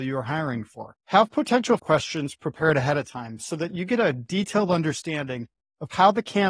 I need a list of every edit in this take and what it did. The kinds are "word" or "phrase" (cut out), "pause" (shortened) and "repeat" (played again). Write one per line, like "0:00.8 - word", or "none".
0:01.0 - pause
0:01.8 - phrase